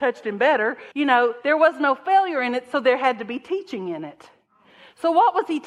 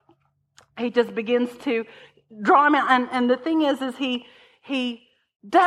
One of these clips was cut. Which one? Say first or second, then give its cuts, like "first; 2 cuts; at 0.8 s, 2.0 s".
first; 1 cut; at 0.9 s